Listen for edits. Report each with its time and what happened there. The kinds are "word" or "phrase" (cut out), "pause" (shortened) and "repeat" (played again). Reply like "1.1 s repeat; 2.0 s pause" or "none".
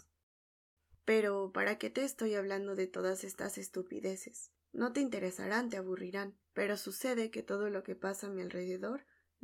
4.6 s pause; 6.4 s pause